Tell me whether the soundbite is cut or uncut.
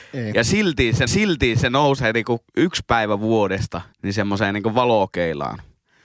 cut